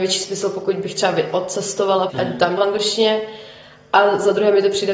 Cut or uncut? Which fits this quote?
cut